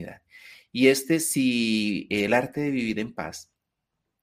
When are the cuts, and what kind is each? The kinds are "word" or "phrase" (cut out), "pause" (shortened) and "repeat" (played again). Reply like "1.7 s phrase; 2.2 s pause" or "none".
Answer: none